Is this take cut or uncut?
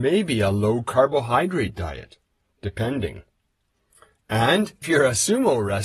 cut